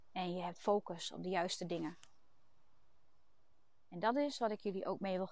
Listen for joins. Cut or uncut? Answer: uncut